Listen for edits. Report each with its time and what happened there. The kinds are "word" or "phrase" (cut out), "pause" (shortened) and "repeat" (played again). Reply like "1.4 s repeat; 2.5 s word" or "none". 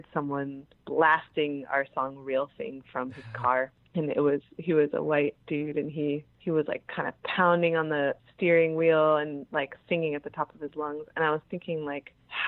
none